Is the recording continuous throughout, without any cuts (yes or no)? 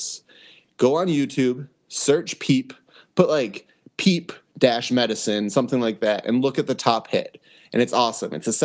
yes